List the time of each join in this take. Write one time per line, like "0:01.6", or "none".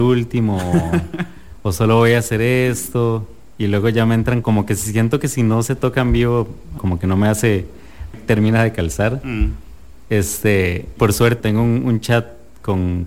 0:04.4
0:06.8
0:08.1
0:11.0
0:11.4